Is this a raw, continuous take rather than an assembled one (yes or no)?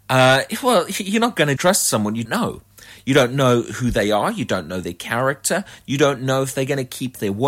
no